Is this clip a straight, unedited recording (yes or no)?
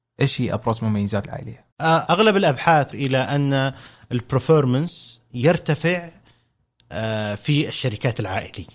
no